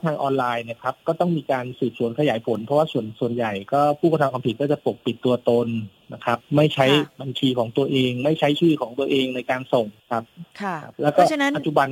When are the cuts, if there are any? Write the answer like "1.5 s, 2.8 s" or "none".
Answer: 10.0 s, 10.5 s, 10.9 s